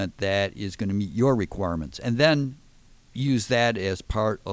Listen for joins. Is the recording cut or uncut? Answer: uncut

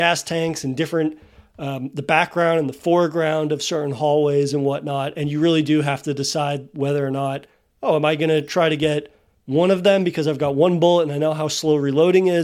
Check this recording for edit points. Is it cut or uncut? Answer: cut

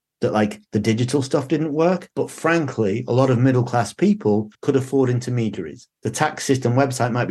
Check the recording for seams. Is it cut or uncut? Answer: cut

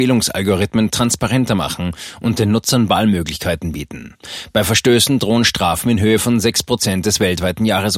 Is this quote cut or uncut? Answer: uncut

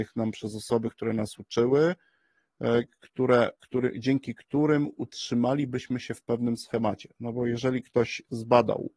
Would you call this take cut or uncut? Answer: cut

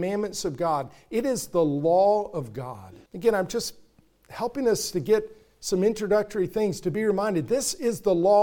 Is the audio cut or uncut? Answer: cut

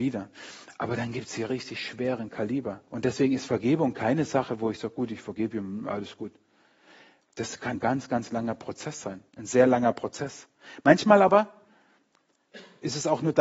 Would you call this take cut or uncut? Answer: cut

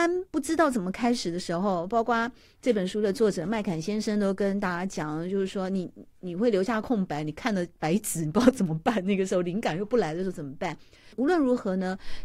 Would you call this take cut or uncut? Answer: uncut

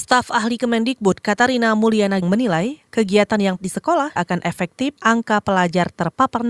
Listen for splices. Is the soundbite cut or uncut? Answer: cut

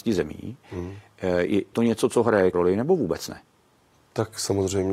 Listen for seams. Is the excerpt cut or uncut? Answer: cut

